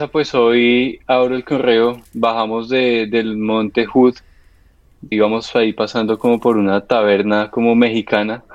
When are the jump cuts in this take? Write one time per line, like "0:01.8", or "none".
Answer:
0:02.1
0:05.1